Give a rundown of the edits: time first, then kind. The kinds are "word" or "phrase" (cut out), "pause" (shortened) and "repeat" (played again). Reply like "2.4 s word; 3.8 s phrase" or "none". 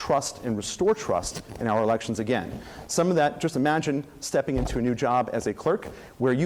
none